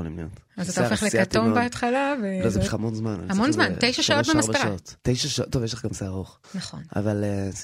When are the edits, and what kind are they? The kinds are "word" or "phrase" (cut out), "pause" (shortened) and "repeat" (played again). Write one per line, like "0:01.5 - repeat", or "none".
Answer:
0:02.7 - word
0:05.0 - pause
0:06.4 - pause

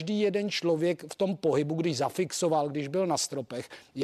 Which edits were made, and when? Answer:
none

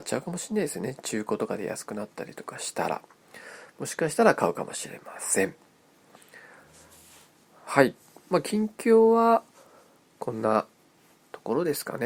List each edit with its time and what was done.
none

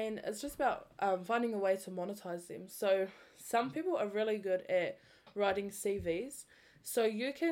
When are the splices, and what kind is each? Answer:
none

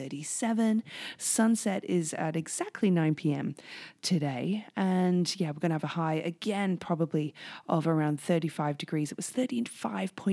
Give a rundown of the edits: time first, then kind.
none

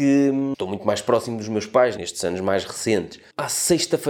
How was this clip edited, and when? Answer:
none

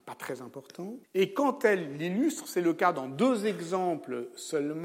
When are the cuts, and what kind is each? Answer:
0:01.0 - pause

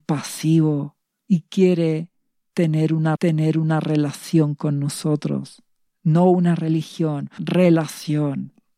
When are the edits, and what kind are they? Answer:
0:01.1 - pause
0:03.2 - repeat
0:05.9 - pause
0:07.4 - word

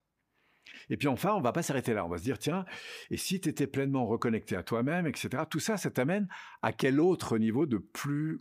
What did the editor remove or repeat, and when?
none

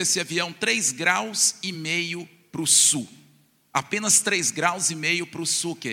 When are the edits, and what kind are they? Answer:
none

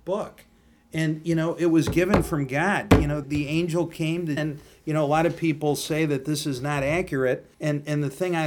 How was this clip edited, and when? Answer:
0:03.2 - word
0:04.4 - word
0:07.5 - pause

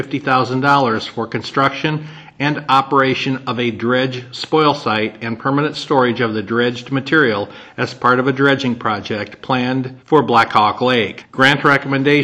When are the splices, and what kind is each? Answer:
0:10.0 - pause

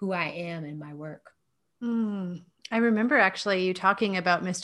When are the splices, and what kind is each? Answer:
none

